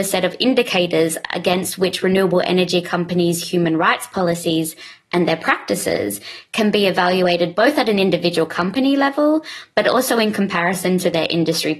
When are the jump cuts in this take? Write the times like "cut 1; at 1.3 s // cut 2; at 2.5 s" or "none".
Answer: none